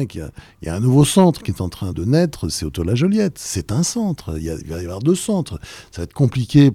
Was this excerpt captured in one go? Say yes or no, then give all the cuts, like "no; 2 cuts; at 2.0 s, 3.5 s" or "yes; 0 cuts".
no; 1 cut; at 1.9 s